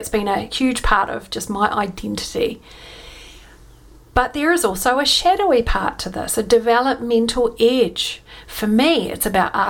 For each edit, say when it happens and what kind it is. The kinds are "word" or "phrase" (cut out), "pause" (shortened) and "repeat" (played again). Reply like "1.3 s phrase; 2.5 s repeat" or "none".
none